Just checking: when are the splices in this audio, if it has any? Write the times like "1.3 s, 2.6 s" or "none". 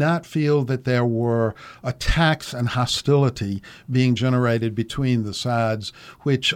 none